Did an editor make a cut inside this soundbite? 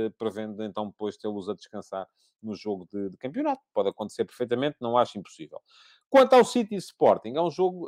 no; 0 cuts

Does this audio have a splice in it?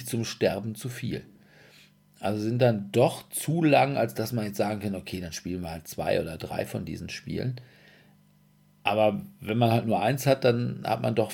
no; 0 cuts

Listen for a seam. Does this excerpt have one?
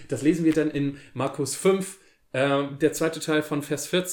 no; 0 cuts

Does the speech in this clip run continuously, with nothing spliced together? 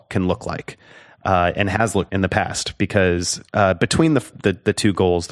no; 2 cuts; at 2.1 s, 3.5 s

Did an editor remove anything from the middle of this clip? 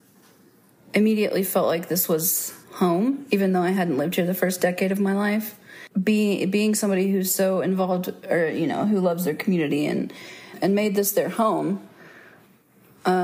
yes; 2 cuts; at 2.6 s, 5.9 s

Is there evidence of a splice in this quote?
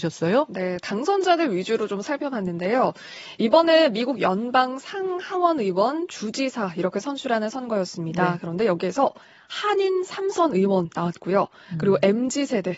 no; 0 cuts

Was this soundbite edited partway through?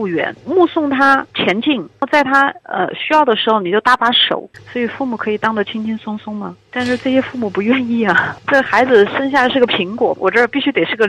yes; 2 cuts; at 1.3 s, 10.2 s

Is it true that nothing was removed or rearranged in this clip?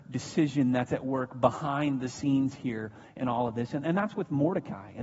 yes; 0 cuts

